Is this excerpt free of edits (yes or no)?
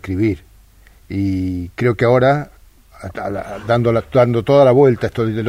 yes